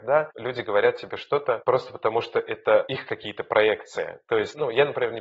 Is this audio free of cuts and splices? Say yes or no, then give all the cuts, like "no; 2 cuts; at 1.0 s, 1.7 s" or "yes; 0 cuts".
yes; 0 cuts